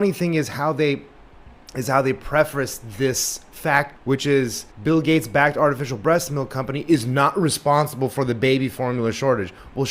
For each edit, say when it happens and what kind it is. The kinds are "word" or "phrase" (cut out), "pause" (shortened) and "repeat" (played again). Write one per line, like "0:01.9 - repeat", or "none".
0:04.0 - word
0:04.7 - pause